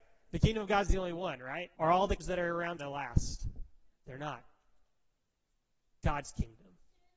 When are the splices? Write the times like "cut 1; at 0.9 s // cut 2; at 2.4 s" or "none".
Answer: cut 1; at 1.7 s // cut 2; at 2.2 s // cut 3; at 2.8 s // cut 4; at 3.9 s